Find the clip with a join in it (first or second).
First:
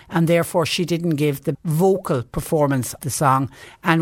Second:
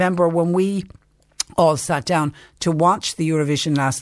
first